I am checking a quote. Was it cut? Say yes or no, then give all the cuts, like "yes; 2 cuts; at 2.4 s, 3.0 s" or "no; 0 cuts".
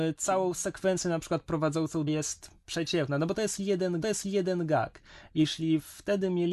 yes; 3 cuts; at 2.1 s, 2.6 s, 4.0 s